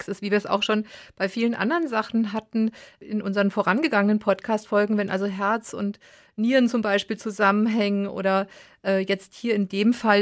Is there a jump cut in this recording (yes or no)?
no